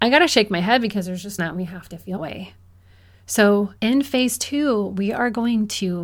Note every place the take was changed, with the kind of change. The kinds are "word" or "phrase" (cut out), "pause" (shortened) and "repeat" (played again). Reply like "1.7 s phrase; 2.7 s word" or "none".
1.4 s phrase; 2.2 s word; 3.8 s pause